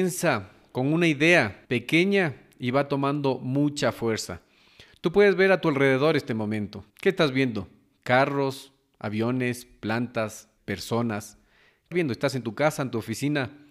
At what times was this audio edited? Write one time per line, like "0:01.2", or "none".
0:01.6
0:06.9
0:10.6
0:11.9